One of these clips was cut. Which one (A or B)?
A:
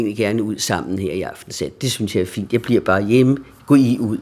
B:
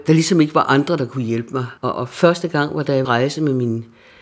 B